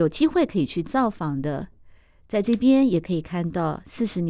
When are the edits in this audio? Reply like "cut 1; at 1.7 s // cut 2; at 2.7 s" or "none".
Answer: none